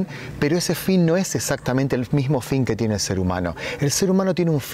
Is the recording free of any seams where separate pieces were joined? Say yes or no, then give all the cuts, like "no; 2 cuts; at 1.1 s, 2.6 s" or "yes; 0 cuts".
yes; 0 cuts